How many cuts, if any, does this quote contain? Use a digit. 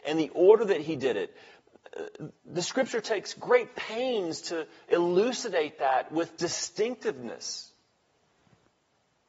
1